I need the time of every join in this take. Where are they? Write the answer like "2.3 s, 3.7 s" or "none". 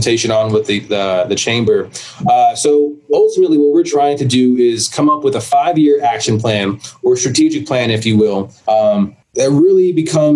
8.6 s